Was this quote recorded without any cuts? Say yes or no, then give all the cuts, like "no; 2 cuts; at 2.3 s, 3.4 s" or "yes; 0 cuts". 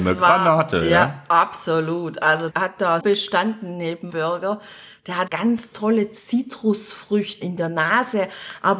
no; 5 cuts; at 2.5 s, 3.0 s, 4.1 s, 5.3 s, 7.4 s